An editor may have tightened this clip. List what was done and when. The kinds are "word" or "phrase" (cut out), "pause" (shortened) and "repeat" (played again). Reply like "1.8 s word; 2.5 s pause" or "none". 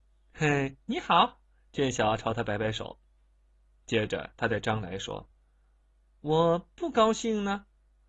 none